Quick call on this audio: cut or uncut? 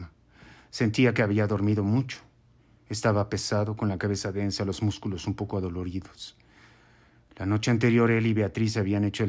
uncut